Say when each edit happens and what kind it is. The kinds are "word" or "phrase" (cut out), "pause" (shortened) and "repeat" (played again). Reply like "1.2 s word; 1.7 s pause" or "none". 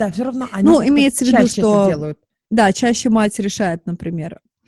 none